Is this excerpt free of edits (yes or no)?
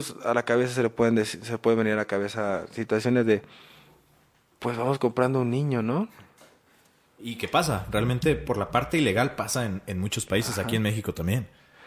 yes